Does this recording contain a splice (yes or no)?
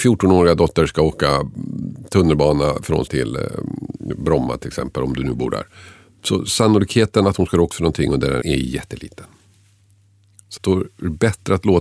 yes